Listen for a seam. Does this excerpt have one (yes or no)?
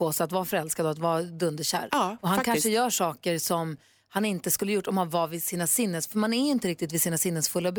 no